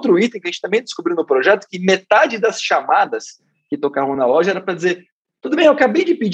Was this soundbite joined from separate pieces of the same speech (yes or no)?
no